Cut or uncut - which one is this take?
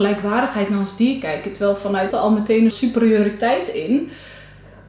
cut